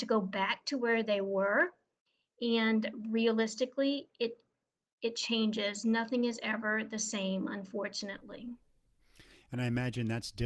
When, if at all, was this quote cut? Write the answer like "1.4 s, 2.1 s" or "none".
none